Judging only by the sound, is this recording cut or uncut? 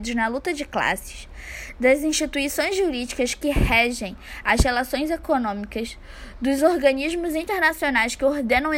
uncut